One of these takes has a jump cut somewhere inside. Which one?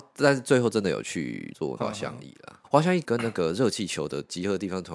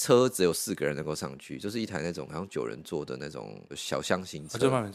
second; 1 cut; at 3.7 s

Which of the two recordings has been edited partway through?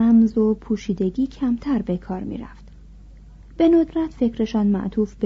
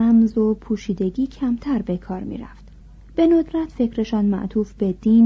second; 1 cut; at 2.8 s

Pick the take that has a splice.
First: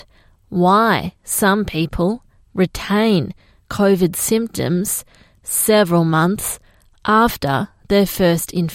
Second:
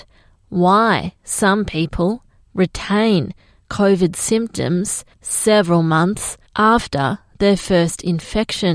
second; 2 cuts; at 5.1 s, 6.5 s

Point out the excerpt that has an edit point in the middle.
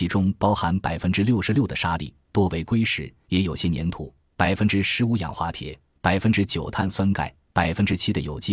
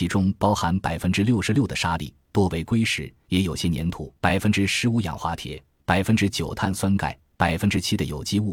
second; 1 cut; at 4.2 s

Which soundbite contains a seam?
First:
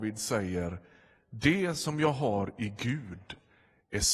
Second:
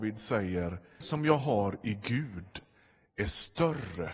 second; 1 cut; at 1.0 s

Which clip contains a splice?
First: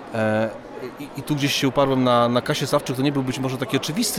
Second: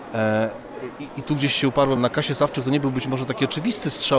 second; 1 cut; at 2.0 s

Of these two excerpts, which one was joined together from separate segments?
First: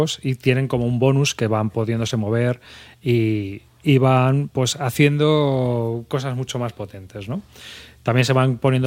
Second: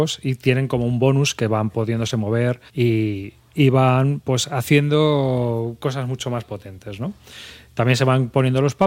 second; 1 cut; at 2.7 s

